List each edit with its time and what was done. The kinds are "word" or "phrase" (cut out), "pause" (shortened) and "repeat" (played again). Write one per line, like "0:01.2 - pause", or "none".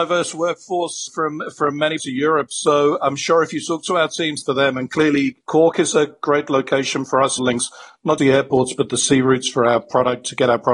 0:01.1 - word
0:02.0 - word
0:04.4 - phrase
0:05.4 - pause
0:07.4 - phrase
0:08.2 - word